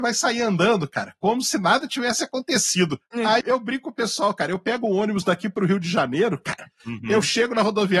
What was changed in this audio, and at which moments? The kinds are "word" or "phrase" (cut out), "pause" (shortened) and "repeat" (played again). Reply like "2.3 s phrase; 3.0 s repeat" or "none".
3.4 s word